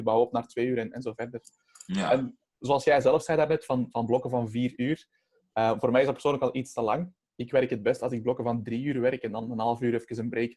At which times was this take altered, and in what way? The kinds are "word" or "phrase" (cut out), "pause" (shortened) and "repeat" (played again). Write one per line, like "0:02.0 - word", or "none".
none